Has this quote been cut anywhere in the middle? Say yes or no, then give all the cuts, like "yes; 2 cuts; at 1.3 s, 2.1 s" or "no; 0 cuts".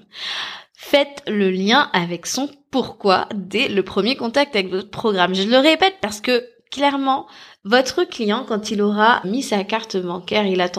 yes; 1 cut; at 9.2 s